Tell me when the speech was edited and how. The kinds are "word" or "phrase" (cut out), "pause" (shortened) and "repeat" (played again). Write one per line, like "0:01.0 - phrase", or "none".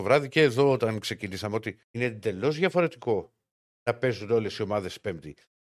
0:01.8 - pause